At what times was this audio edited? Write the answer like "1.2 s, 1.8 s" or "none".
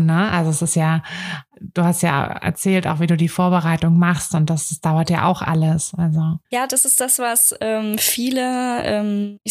6.4 s